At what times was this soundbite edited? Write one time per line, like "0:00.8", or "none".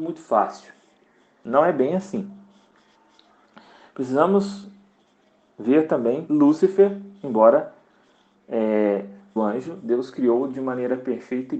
0:06.3
0:09.4